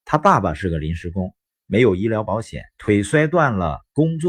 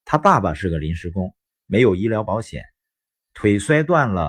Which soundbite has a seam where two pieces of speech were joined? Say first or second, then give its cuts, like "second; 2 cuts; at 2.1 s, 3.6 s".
first; 1 cut; at 2.7 s